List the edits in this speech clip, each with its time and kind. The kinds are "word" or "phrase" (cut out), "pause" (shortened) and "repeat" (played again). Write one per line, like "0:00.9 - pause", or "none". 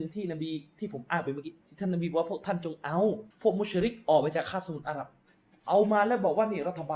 0:01.6 - pause
0:03.3 - pause
0:05.5 - pause